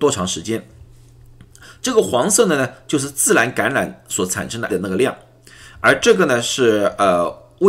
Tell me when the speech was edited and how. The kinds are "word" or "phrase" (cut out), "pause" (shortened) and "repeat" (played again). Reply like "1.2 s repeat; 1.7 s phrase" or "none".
4.7 s word